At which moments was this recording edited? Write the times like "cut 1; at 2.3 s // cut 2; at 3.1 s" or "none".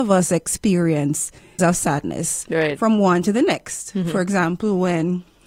cut 1; at 1.6 s // cut 2; at 3.2 s